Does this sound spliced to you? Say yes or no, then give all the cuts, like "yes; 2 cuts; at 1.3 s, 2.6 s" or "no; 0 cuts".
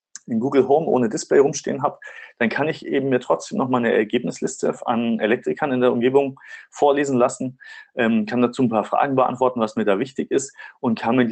no; 0 cuts